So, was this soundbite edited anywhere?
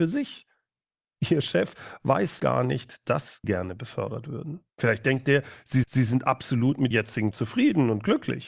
yes; 6 cuts; at 2.4 s, 3.4 s, 4.7 s, 5.8 s, 6.9 s, 7.3 s

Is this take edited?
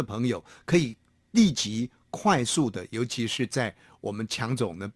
no; 0 cuts

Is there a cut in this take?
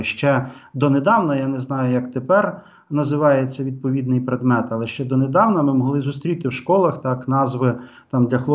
no; 0 cuts

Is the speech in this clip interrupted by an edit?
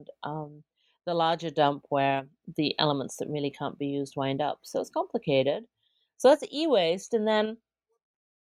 no; 0 cuts

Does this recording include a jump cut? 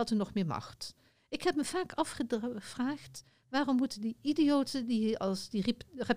no; 0 cuts

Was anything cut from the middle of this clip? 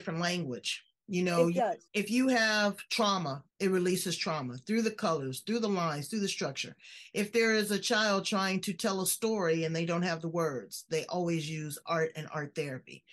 yes; 2 cuts; at 1.9 s, 3.5 s

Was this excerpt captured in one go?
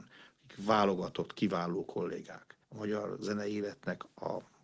no; 1 cut; at 2.6 s

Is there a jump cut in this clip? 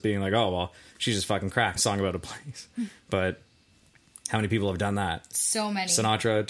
yes; 1 cut; at 1.8 s

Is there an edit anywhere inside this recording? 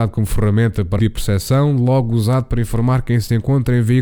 yes; 1 cut; at 1.0 s

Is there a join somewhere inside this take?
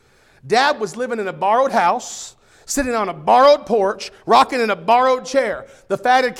no; 0 cuts

